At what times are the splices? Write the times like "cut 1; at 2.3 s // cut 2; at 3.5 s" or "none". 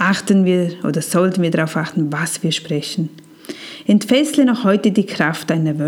none